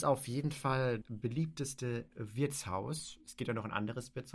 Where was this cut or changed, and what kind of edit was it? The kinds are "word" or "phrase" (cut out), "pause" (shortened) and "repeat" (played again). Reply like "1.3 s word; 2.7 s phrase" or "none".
1.0 s word